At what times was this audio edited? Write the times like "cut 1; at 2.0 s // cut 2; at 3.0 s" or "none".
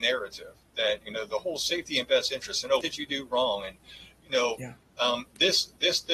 cut 1; at 2.8 s

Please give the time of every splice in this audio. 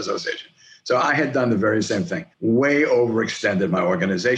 cut 1; at 2.3 s

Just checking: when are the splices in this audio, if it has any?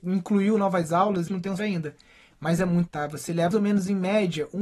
cut 1; at 1.3 s // cut 2; at 1.6 s // cut 3; at 2.9 s // cut 4; at 3.5 s

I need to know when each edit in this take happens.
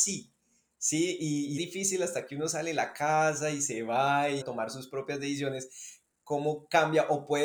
cut 1; at 1.6 s // cut 2; at 4.4 s

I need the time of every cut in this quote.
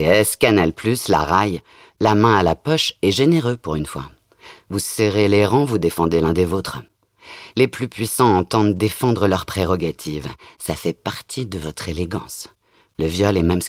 none

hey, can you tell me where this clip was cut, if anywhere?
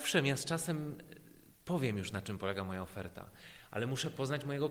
none

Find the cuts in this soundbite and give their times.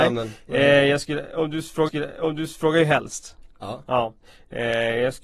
cut 1; at 1.9 s

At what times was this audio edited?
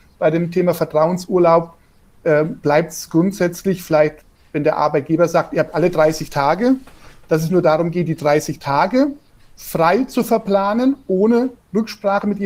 none

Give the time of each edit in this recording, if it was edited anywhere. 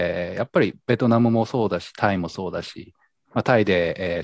none

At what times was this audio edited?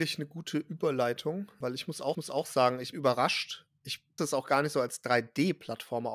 cut 1; at 2.1 s // cut 2; at 2.9 s // cut 3; at 4.2 s

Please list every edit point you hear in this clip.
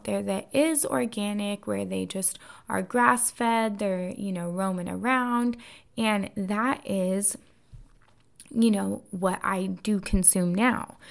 none

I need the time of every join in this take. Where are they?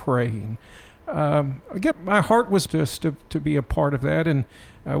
cut 1; at 1.9 s // cut 2; at 2.7 s

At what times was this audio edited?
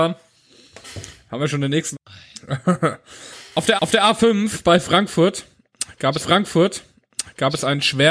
cut 1; at 1.9 s // cut 2; at 3.8 s // cut 3; at 6.2 s

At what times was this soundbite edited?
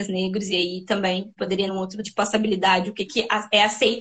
cut 1; at 1.4 s // cut 2; at 1.7 s // cut 3; at 2.0 s

